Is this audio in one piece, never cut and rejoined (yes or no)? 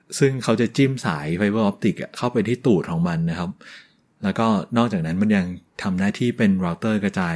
yes